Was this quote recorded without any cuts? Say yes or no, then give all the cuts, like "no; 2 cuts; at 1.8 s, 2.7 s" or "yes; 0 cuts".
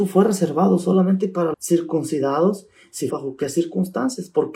no; 2 cuts; at 1.5 s, 3.1 s